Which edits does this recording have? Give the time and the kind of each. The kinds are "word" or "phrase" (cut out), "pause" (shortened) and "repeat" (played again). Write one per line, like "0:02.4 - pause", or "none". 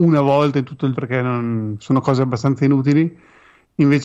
0:00.9 - word
0:01.8 - word